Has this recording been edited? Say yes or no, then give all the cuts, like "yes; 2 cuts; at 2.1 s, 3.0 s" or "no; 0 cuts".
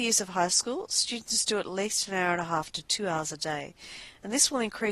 no; 0 cuts